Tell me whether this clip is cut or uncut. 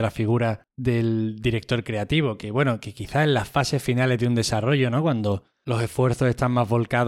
uncut